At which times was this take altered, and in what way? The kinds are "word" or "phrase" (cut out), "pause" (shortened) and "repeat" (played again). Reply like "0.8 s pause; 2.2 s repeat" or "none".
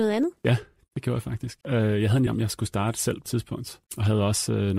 1.6 s pause; 2.3 s word; 3.3 s word; 3.9 s pause

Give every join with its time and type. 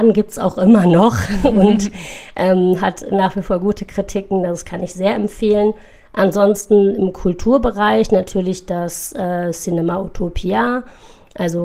none

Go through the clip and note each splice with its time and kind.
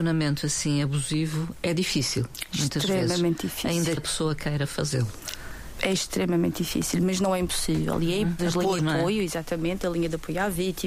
4.0 s word; 8.4 s phrase; 8.8 s word

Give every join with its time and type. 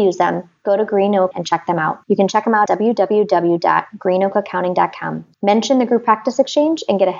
1.3 s word; 2.0 s pause; 2.7 s word; 5.3 s pause

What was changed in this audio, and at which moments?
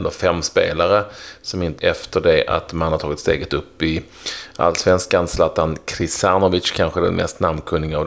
1.8 s phrase

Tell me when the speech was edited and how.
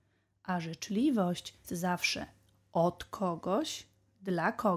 1.6 s word

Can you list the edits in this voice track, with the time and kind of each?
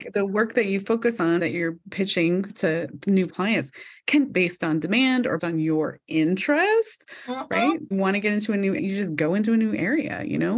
1.4 s word; 3.3 s word; 4.3 s word; 5.4 s word; 7.9 s word; 8.8 s word

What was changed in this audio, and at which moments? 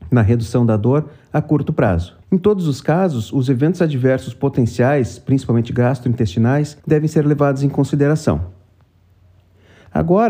2.2 s pause; 6.8 s pause

